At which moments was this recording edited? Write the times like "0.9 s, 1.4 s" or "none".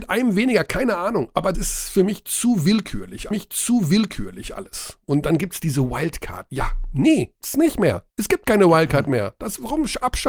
1.5 s, 3.3 s, 7.4 s, 8.1 s